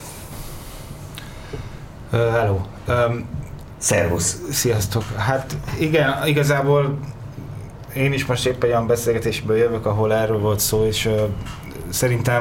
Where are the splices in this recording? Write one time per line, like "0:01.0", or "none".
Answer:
none